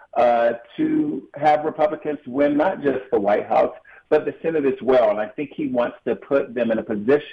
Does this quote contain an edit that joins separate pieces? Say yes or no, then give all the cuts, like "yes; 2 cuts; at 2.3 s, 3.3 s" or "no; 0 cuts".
no; 0 cuts